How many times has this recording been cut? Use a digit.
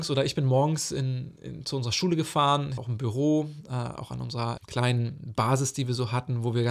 2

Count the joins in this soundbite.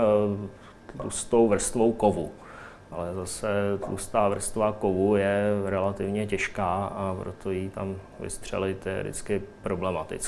0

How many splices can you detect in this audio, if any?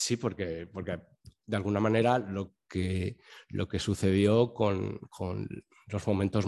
0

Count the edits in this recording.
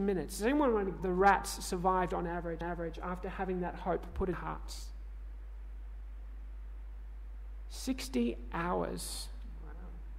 3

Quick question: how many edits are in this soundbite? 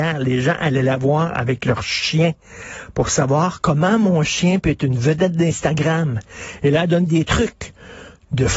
0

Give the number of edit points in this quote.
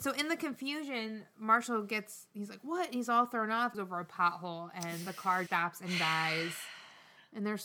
2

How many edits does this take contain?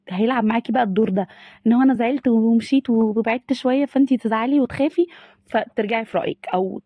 0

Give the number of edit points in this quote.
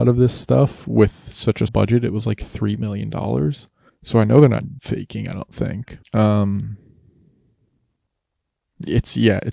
4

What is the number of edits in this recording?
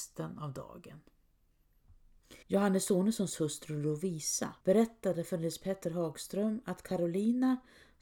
2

